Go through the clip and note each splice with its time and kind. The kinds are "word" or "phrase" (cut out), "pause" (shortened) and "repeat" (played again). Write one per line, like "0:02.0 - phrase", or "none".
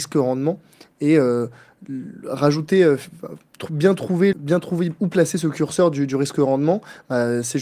0:04.3 - word